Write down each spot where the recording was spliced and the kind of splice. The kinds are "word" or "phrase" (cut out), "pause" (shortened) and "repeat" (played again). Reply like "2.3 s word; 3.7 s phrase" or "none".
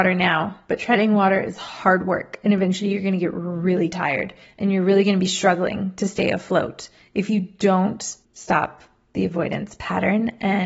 none